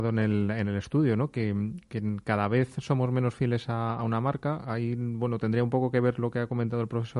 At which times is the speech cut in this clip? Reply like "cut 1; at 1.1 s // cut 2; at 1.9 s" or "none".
none